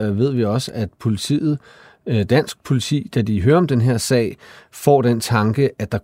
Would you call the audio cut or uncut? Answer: uncut